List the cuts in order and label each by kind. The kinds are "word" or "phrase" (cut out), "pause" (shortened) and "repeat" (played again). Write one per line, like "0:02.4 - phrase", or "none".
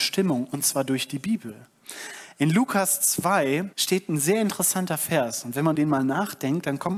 0:03.7 - pause
0:05.7 - word